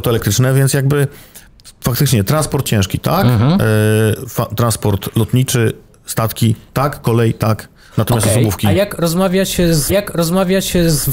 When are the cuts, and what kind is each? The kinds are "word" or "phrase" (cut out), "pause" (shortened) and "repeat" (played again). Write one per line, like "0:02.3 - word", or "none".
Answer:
0:09.9 - repeat